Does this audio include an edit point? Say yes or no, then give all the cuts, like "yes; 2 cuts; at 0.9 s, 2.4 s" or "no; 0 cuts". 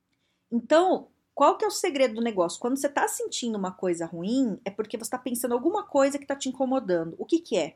no; 0 cuts